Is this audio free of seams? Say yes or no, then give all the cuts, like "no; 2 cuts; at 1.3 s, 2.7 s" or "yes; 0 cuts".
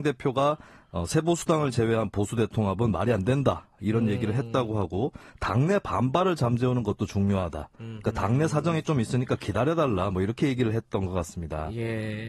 yes; 0 cuts